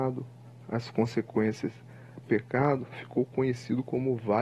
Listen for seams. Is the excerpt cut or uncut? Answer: cut